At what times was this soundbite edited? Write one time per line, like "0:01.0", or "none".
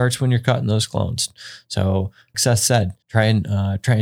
0:02.3
0:03.0